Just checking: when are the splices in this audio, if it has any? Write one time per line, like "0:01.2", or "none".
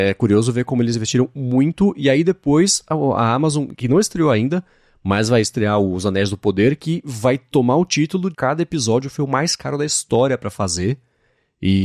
0:08.3